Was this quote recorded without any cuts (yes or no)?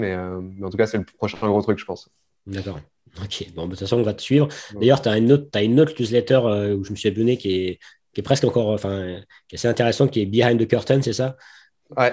yes